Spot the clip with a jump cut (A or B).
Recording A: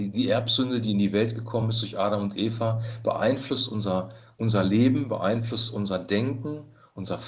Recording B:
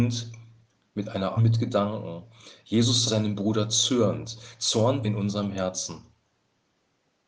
B